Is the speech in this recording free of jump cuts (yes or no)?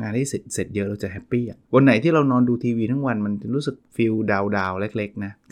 no